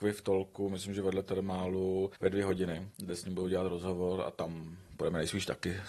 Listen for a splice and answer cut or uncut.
cut